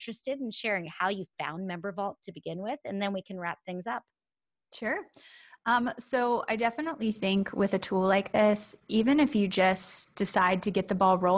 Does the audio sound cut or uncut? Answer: uncut